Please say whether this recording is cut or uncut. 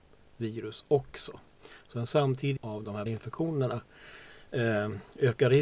cut